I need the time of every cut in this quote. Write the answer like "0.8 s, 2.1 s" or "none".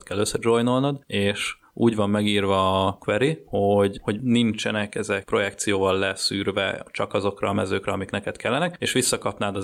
none